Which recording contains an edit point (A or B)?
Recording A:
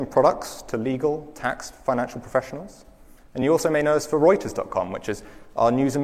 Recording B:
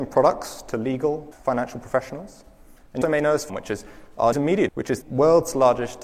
B